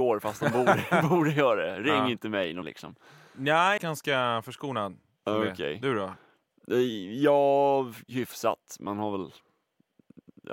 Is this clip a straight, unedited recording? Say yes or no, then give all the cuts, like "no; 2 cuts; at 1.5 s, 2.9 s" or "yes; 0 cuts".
no; 2 cuts; at 2.6 s, 3.8 s